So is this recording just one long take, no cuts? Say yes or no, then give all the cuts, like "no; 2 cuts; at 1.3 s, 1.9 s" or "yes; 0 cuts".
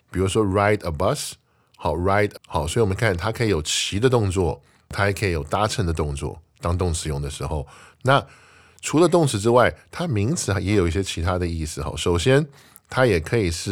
no; 1 cut; at 2.4 s